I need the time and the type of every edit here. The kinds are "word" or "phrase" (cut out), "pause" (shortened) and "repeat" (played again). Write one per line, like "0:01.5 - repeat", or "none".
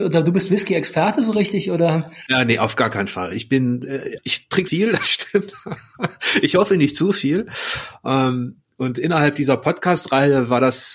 0:04.2 - word
0:04.7 - word